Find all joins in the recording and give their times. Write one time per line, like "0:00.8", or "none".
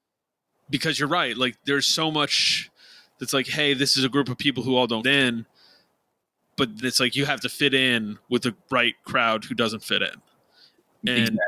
0:05.0
0:06.8
0:08.6